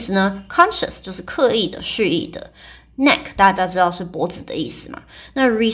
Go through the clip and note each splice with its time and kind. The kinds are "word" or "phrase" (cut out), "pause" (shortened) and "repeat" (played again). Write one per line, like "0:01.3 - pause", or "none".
none